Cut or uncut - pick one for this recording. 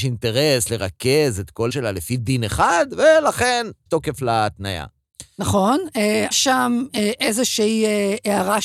cut